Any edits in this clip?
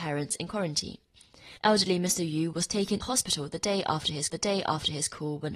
yes; 3 cuts; at 1.6 s, 3.0 s, 4.3 s

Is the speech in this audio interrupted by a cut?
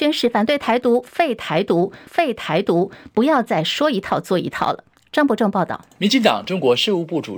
yes; 1 cut; at 2.1 s

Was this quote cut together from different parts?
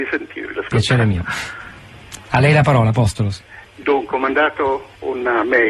no; 0 cuts

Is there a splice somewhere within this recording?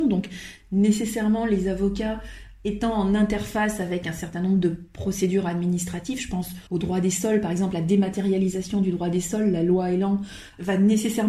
yes; 1 cut; at 6.7 s

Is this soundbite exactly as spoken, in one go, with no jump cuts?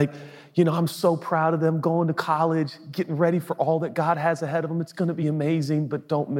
yes; 0 cuts

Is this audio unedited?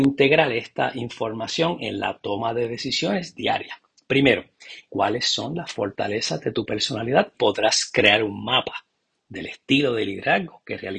no; 2 cuts; at 4.9 s, 7.3 s

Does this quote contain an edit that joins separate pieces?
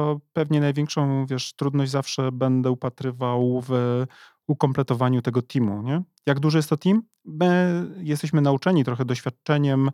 no; 0 cuts

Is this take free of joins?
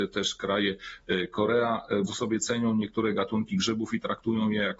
no; 1 cut; at 2.1 s

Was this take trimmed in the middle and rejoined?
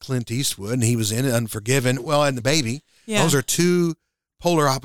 yes; 1 cut; at 2.4 s

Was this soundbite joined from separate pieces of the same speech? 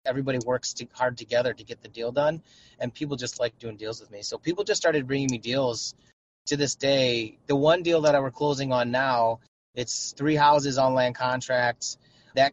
no; 0 cuts

